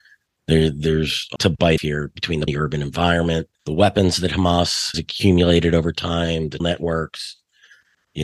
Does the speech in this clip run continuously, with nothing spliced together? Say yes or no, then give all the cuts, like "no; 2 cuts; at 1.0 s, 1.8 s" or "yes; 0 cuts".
no; 6 cuts; at 1.4 s, 1.8 s, 2.5 s, 3.5 s, 4.9 s, 6.6 s